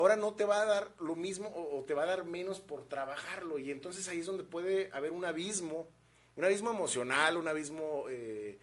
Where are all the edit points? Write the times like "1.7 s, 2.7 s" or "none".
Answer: none